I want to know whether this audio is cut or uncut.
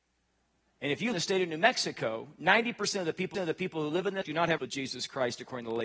cut